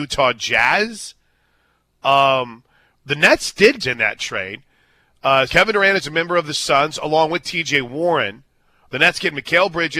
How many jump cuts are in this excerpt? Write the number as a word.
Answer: two